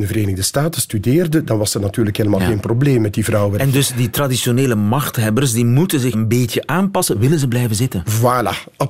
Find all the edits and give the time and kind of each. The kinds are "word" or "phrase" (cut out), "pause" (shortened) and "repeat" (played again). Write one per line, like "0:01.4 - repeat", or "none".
0:06.1 - word